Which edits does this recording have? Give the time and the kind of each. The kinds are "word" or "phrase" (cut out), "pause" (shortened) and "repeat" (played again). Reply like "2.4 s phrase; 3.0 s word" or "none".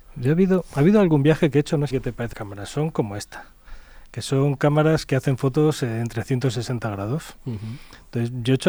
1.9 s phrase; 2.3 s word